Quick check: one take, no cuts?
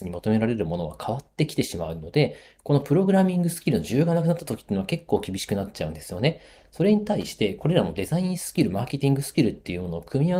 yes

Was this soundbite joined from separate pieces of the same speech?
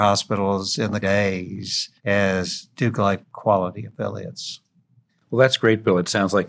yes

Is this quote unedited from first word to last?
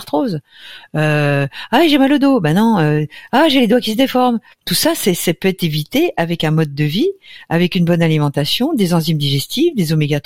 yes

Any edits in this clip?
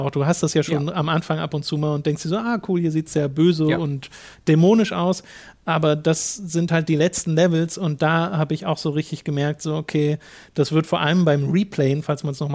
no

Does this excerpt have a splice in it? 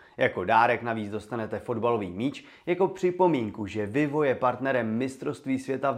no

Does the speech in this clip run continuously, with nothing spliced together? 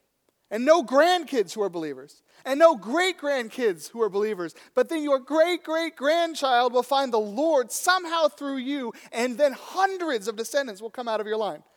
yes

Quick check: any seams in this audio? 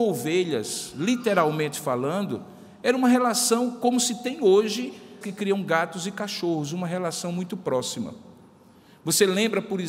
yes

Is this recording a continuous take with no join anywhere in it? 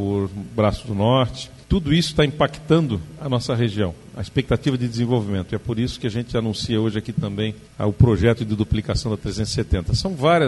no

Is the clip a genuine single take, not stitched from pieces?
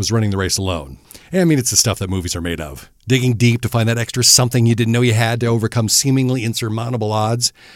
yes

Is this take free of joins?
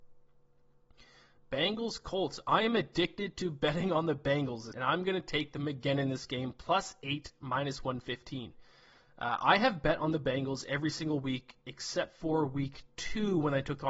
no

